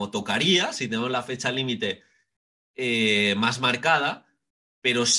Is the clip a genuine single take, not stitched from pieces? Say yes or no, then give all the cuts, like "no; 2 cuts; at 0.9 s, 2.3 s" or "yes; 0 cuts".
yes; 0 cuts